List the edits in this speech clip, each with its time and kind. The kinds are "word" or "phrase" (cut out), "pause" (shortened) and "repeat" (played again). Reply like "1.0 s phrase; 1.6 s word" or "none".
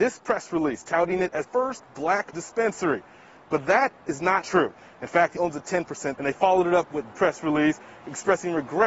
1.4 s word; 2.3 s word; 4.4 s word; 5.4 s word; 6.1 s word; 7.1 s word